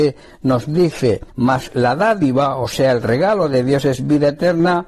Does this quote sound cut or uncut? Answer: cut